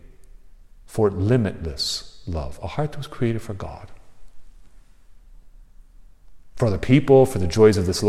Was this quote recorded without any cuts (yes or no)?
yes